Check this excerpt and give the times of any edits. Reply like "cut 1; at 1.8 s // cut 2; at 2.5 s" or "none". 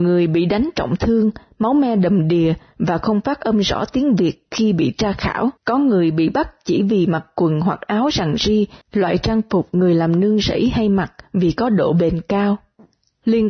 cut 1; at 5.6 s // cut 2; at 8.8 s